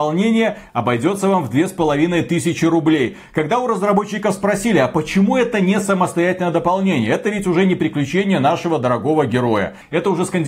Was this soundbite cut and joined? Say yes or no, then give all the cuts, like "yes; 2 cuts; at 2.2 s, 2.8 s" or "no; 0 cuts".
no; 0 cuts